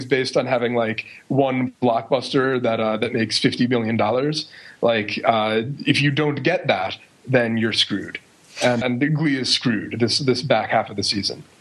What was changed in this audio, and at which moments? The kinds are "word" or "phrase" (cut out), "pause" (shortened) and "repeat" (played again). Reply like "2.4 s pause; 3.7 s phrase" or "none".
8.8 s word